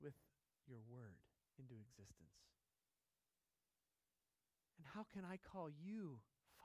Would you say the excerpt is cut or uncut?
uncut